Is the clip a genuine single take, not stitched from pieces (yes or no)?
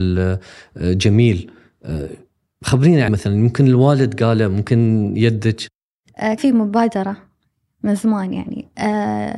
no